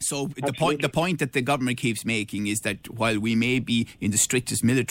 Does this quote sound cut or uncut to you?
uncut